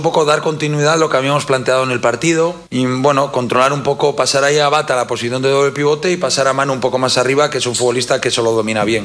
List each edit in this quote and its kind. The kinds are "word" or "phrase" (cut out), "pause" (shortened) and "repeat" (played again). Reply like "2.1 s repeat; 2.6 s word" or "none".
2.7 s pause